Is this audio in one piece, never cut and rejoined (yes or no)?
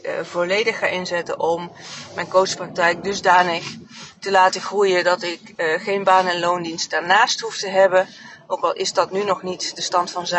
yes